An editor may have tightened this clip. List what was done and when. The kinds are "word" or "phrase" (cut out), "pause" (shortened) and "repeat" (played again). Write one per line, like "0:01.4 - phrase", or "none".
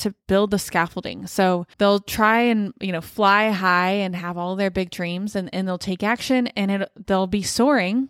0:01.7 - pause